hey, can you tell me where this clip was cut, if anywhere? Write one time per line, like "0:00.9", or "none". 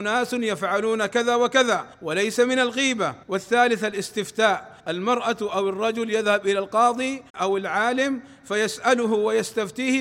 0:01.9
0:03.2
0:04.8
0:07.3